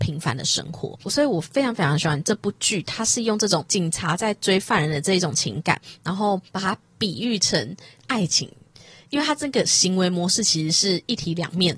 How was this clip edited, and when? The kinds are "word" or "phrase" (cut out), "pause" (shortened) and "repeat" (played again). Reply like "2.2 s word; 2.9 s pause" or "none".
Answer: 6.5 s pause

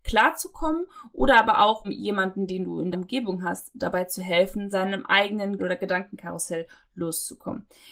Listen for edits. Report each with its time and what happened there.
1.8 s word; 2.9 s word; 4.7 s word; 5.6 s word

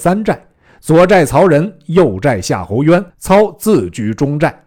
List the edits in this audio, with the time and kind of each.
3.1 s pause

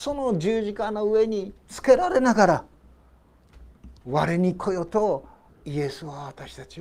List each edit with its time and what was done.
5.5 s pause

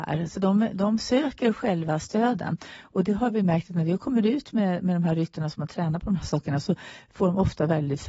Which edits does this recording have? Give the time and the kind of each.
none

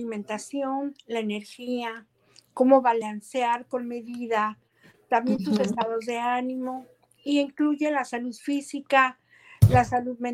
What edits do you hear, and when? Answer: none

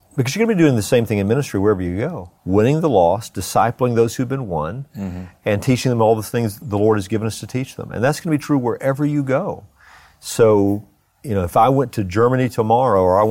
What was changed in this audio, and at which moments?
2.4 s pause; 6.6 s word

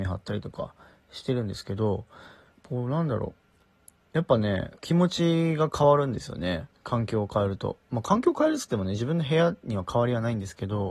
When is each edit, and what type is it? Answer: 2.5 s pause; 4.8 s pause; 6.7 s pause

